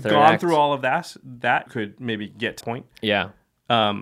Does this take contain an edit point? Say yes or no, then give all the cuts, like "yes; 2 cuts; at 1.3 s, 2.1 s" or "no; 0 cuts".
yes; 2 cuts; at 1.7 s, 2.6 s